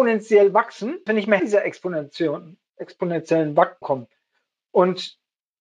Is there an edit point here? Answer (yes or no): yes